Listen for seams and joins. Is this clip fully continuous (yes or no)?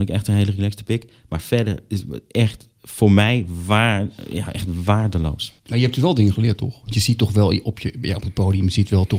no